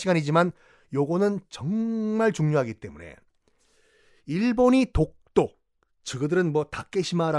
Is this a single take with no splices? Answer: yes; 0 cuts

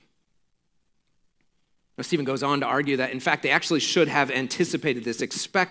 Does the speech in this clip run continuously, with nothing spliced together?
yes; 0 cuts

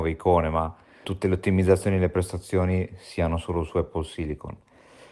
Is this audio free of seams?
no; 1 cut; at 1.0 s

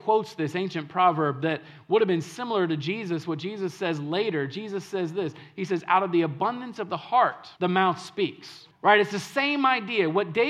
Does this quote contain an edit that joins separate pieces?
yes; 2 cuts; at 7.6 s, 8.7 s

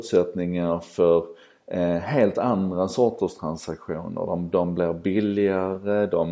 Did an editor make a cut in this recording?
no; 0 cuts

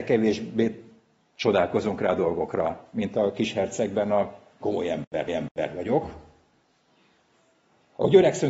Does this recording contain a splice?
yes; 2 cuts; at 4.6 s, 5.3 s

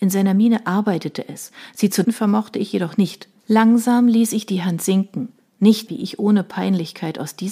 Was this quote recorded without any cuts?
no; 3 cuts; at 2.0 s, 3.4 s, 5.9 s

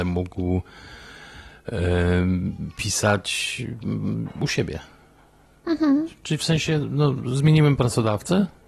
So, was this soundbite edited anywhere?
no; 0 cuts

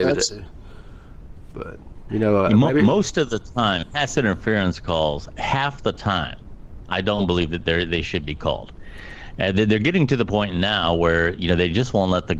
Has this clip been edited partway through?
no; 0 cuts

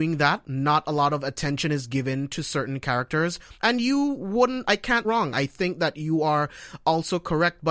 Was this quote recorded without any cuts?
no; 2 cuts; at 3.6 s, 5.0 s

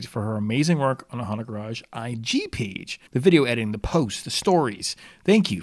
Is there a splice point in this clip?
yes; 1 cut; at 3.1 s

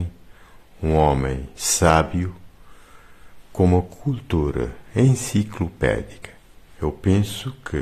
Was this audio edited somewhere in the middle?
no; 0 cuts

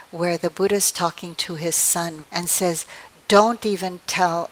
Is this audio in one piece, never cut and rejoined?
no; 1 cut; at 2.2 s

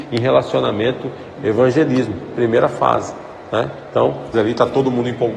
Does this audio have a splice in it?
yes; 2 cuts; at 1.4 s, 4.3 s

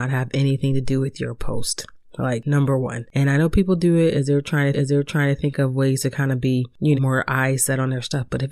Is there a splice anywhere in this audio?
yes; 2 cuts; at 4.7 s, 6.9 s

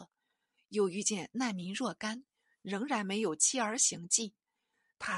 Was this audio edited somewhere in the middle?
no; 0 cuts

